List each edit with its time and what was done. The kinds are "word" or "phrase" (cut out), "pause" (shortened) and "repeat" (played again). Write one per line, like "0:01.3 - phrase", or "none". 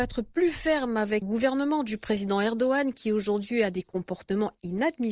0:01.2 - word